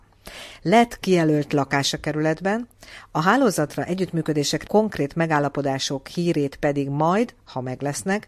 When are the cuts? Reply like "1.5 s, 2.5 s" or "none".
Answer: 1.0 s, 4.7 s